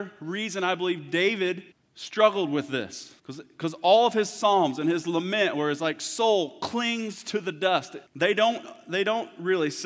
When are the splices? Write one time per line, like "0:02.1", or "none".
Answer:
0:01.7
0:03.2
0:08.1